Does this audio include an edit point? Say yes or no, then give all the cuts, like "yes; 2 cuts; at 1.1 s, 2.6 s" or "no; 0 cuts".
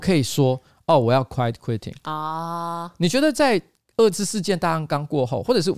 no; 0 cuts